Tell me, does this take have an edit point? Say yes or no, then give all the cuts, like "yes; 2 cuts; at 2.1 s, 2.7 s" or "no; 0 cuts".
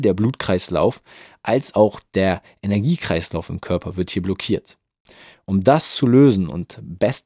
no; 0 cuts